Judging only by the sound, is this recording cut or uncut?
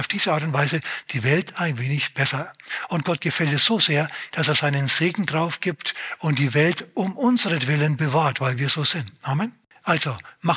uncut